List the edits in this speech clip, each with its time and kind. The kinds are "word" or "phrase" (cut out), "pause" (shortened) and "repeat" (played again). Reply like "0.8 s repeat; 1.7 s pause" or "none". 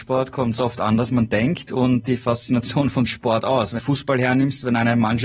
1.1 s word; 2.0 s phrase; 3.1 s word; 3.8 s phrase